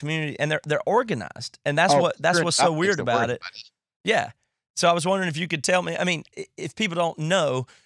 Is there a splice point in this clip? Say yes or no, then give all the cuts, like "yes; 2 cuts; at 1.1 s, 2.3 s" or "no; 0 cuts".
no; 0 cuts